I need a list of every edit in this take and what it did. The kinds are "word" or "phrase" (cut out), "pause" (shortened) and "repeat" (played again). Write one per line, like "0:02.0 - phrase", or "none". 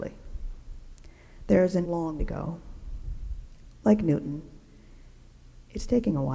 0:01.8 - word
0:02.2 - word